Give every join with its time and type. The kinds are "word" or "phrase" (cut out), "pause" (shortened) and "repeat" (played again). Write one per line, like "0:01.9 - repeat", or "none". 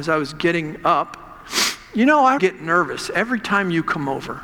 0:02.4 - word